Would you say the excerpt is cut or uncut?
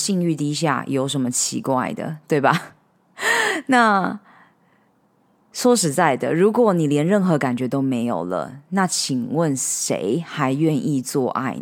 uncut